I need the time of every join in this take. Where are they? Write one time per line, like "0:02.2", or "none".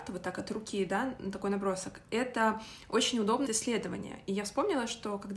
0:03.5

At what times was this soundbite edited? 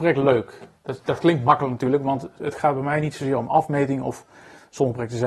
0:02.4

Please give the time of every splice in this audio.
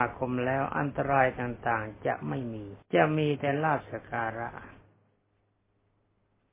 0:02.8

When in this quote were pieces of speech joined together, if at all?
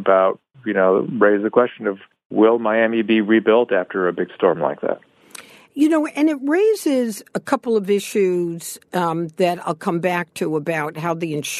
none

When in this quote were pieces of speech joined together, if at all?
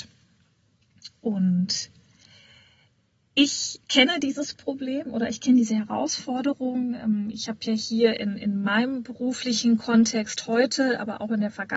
0:03.8

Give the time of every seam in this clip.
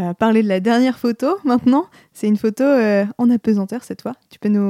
none

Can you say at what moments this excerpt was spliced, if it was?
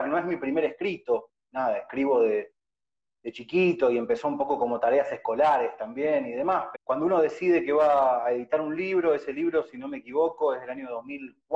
0:01.4
0:06.7

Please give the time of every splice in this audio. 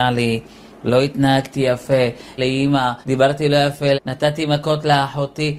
0:02.4
0:03.0
0:03.9

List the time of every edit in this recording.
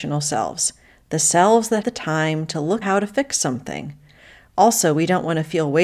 0:01.8
0:02.8

